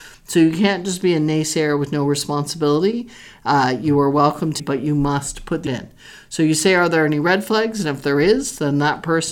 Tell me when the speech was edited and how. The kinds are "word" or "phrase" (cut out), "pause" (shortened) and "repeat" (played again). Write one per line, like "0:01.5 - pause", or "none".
0:04.6 - word
0:05.7 - word